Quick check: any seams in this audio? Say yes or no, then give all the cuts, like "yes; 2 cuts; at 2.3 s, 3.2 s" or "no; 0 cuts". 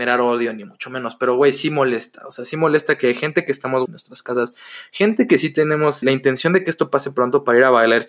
yes; 2 cuts; at 3.9 s, 6.0 s